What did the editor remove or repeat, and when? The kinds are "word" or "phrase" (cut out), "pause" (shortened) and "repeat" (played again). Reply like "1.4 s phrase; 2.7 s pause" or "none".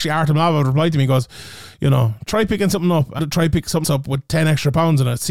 3.2 s word; 3.8 s word